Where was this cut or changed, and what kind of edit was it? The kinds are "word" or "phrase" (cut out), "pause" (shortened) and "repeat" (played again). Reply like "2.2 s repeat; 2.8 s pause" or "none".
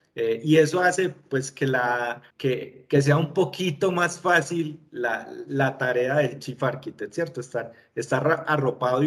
2.3 s pause